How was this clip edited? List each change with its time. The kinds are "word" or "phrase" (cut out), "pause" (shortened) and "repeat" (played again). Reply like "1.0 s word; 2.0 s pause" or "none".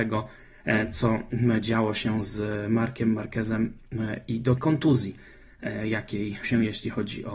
4.6 s word; 6.4 s word